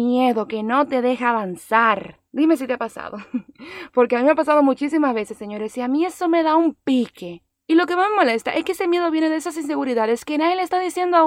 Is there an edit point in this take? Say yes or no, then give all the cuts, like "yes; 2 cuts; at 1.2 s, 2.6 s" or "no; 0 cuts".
yes; 2 cuts; at 2.3 s, 7.5 s